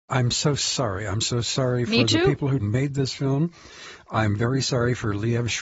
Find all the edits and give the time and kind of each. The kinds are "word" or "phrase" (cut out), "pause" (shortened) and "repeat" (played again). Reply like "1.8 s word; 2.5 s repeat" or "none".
none